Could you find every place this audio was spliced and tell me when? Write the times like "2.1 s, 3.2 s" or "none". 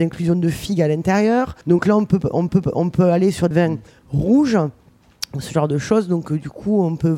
1.6 s, 2.5 s, 3.5 s